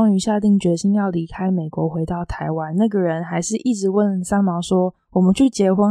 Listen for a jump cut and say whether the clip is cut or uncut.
uncut